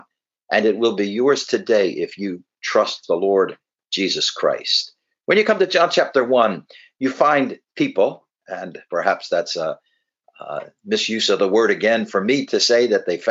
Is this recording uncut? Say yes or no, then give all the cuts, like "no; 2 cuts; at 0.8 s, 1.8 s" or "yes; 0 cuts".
yes; 0 cuts